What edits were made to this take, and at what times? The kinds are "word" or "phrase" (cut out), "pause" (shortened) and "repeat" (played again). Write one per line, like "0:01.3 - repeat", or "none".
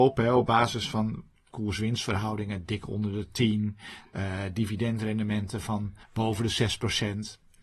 0:06.0 - pause